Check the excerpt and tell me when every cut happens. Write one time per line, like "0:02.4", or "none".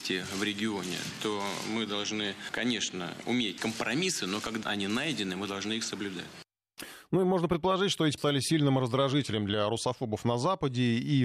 0:03.6
0:04.6
0:08.2